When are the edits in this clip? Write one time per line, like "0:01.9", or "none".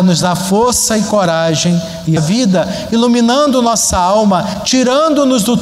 0:02.2